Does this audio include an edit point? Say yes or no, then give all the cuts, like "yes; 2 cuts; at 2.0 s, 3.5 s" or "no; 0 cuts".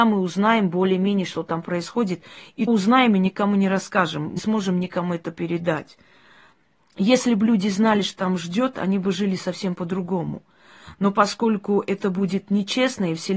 yes; 3 cuts; at 2.7 s, 4.4 s, 8.2 s